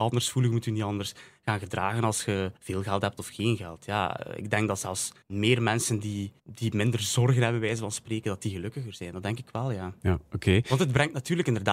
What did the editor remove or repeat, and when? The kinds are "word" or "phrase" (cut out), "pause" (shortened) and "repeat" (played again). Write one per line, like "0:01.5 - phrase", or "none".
0:02.6 - pause
0:05.2 - pause
0:06.4 - pause